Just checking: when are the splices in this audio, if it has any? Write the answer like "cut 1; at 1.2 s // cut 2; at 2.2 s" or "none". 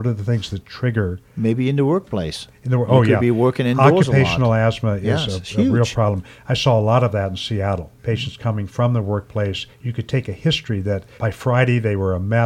cut 1; at 8.0 s // cut 2; at 11.2 s